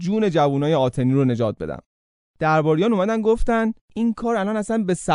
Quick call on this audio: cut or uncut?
uncut